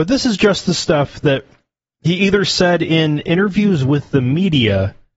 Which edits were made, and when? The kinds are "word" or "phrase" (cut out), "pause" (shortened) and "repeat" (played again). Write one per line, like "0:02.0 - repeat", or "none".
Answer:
none